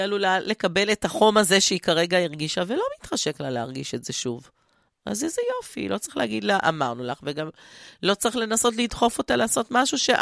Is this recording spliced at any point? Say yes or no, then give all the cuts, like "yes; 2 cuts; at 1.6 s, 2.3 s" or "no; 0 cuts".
no; 0 cuts